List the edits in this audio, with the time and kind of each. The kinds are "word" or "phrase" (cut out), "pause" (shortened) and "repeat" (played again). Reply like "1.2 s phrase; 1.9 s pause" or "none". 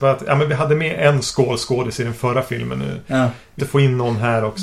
3.6 s word